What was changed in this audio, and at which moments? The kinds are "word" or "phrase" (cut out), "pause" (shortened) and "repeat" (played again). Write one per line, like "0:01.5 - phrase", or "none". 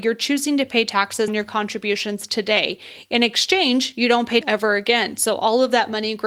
0:01.3 - word
0:04.4 - word